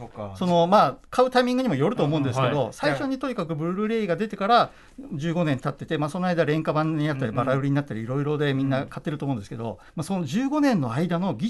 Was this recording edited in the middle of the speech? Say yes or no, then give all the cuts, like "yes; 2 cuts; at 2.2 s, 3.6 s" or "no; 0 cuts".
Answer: yes; 1 cut; at 9.9 s